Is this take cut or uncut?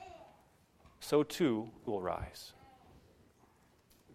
cut